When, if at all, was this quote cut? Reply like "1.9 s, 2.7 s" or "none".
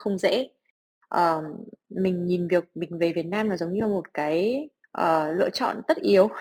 4.8 s